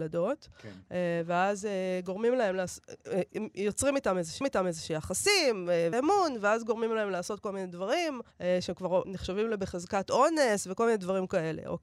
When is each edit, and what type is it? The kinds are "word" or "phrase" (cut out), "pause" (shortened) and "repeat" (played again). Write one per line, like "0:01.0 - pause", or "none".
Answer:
0:04.4 - repeat
0:05.9 - phrase
0:08.3 - pause
0:09.0 - word